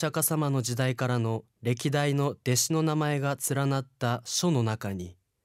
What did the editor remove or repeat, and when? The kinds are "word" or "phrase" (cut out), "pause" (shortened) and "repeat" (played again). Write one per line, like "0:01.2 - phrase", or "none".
0:01.5 - pause